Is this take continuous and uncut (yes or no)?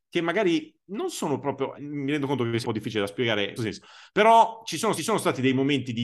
no